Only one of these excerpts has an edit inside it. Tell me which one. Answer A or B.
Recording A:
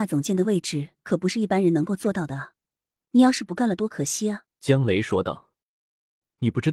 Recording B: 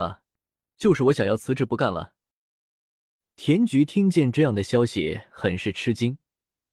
A